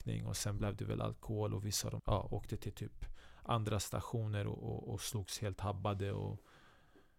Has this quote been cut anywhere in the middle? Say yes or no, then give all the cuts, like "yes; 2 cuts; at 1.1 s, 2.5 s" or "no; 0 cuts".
yes; 1 cut; at 2.0 s